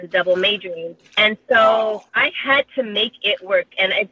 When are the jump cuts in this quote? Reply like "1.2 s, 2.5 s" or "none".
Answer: 1.1 s, 2.1 s